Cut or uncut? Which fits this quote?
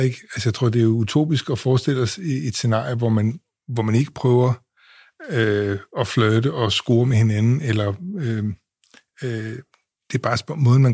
uncut